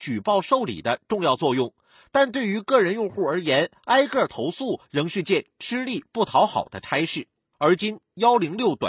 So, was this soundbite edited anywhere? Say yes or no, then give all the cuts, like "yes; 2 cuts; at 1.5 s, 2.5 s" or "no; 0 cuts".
no; 0 cuts